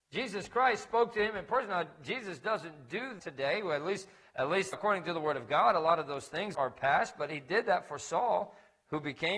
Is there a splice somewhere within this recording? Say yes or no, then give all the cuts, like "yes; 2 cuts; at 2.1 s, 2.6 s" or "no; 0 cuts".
yes; 3 cuts; at 3.2 s, 4.7 s, 6.5 s